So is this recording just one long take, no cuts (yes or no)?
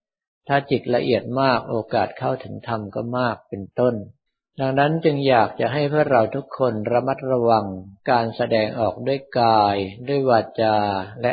no